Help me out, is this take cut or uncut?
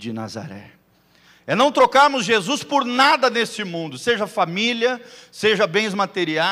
uncut